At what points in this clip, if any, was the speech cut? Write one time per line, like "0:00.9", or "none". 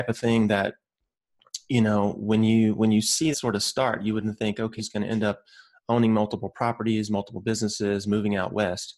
0:03.3
0:04.8